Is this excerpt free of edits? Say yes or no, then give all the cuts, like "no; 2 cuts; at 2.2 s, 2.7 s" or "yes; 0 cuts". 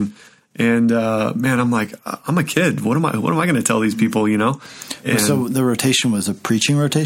yes; 0 cuts